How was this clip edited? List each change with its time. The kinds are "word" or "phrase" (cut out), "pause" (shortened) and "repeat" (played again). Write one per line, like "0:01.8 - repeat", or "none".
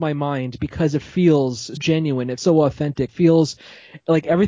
0:01.8 - word
0:02.4 - word
0:03.1 - word